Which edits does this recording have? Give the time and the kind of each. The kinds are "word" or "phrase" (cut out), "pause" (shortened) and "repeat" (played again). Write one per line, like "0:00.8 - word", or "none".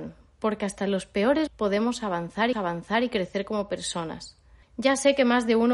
0:01.5 - word
0:02.5 - repeat
0:04.6 - pause